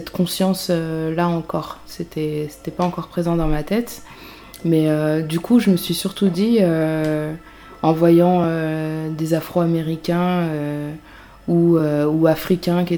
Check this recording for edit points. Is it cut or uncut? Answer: uncut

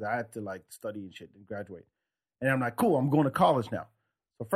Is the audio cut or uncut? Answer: uncut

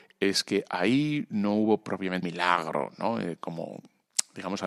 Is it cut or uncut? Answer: cut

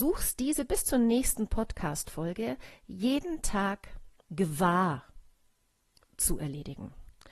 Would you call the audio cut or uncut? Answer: uncut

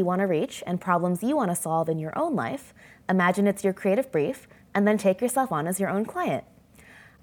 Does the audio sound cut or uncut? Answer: uncut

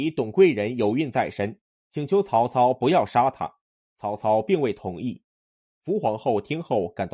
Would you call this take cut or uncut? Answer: uncut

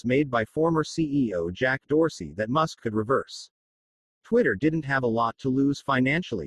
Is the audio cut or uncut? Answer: uncut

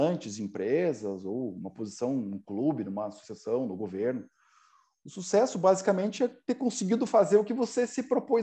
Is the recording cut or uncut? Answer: uncut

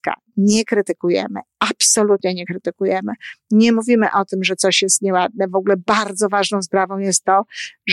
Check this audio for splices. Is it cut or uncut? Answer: uncut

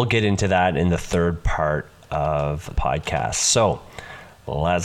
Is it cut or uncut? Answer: cut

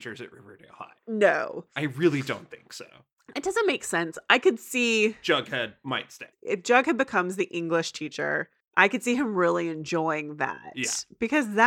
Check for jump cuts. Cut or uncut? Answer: cut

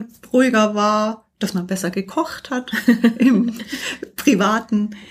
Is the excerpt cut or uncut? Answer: cut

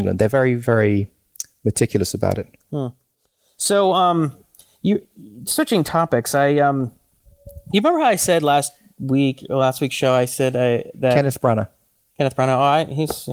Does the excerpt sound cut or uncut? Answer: uncut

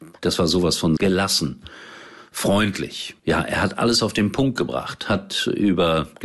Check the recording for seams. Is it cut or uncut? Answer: cut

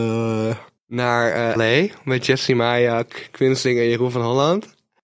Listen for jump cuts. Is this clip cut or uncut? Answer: cut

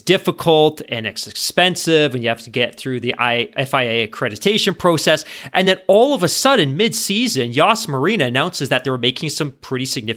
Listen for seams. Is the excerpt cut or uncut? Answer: uncut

